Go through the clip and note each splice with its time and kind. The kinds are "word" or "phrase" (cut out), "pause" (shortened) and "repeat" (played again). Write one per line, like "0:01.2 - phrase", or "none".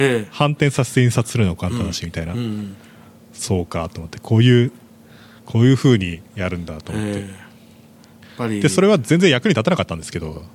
0:06.3 - pause